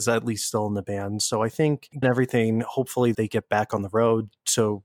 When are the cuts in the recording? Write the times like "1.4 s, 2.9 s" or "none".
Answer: 2.0 s, 3.1 s